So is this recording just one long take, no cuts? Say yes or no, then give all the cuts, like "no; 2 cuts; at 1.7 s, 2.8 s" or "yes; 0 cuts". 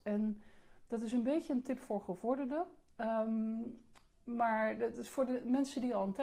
yes; 0 cuts